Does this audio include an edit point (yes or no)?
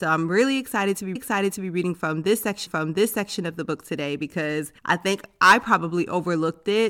yes